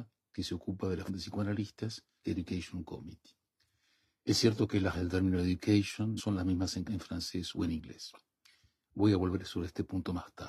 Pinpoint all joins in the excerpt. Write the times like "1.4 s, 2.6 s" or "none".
1.1 s, 2.2 s, 4.9 s, 6.2 s, 6.8 s